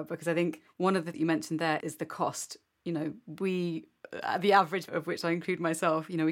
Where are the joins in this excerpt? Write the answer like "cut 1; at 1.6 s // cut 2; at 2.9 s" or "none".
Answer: cut 1; at 1.1 s // cut 2; at 1.8 s // cut 3; at 4.9 s